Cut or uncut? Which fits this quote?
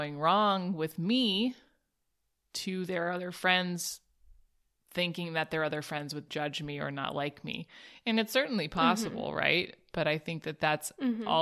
cut